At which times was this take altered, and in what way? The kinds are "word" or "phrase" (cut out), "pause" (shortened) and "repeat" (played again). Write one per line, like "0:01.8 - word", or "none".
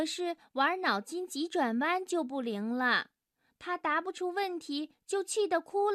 none